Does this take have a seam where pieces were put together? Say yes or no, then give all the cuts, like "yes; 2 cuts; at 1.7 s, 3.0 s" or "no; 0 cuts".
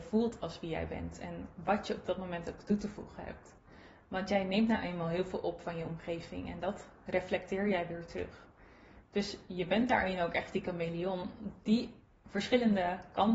no; 0 cuts